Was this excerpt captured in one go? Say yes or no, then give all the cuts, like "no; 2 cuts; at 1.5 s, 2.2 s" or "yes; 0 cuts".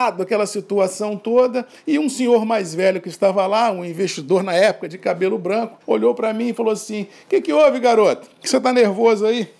no; 1 cut; at 5.8 s